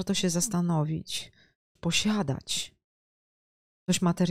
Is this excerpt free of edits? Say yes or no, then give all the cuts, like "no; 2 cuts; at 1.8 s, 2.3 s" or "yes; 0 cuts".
no; 1 cut; at 1.8 s